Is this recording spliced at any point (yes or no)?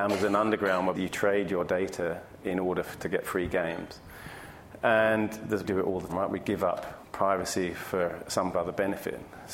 yes